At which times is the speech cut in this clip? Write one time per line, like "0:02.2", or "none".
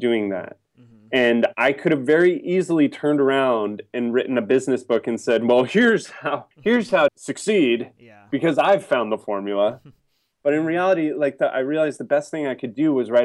0:06.5
0:07.1